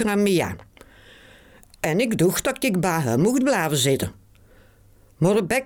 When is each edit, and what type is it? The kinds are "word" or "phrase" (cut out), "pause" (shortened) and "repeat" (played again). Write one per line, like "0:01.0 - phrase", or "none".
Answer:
none